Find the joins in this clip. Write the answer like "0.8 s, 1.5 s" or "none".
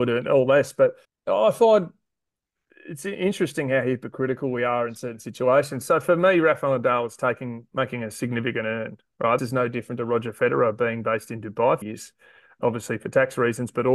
1.0 s, 9.4 s, 11.8 s, 12.6 s